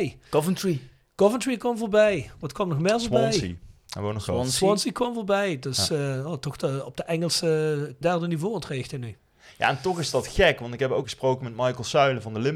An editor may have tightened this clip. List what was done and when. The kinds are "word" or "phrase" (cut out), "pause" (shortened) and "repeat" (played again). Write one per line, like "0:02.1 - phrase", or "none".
0:08.0 - word
0:11.0 - word